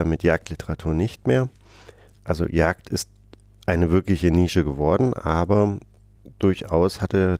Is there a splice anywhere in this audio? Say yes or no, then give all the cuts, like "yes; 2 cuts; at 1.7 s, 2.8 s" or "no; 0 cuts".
no; 0 cuts